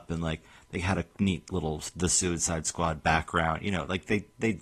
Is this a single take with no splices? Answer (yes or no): yes